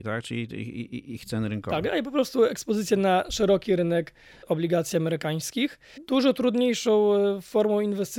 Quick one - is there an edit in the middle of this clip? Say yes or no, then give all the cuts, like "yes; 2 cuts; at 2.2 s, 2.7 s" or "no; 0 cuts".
no; 0 cuts